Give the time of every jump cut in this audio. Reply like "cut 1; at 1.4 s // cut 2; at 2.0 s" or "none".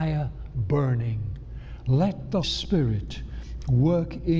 cut 1; at 2.4 s